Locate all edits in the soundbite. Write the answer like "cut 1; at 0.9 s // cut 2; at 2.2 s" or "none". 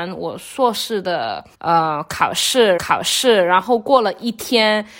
cut 1; at 1.5 s // cut 2; at 2.8 s